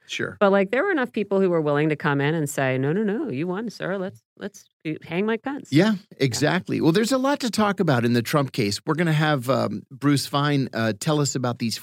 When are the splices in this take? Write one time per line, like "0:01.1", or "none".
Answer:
none